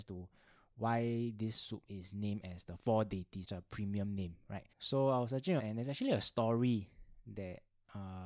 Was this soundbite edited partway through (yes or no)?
yes